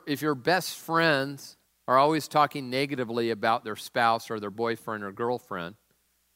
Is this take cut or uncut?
cut